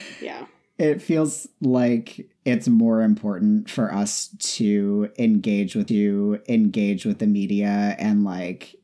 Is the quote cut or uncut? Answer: cut